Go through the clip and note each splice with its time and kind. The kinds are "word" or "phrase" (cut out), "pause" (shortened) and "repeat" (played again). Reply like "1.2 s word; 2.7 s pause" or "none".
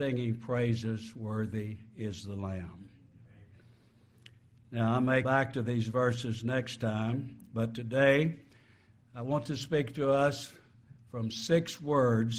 5.2 s word